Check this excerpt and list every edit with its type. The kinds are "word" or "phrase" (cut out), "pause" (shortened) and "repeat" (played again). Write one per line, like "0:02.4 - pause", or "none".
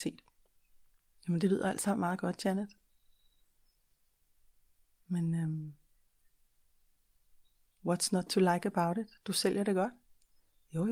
none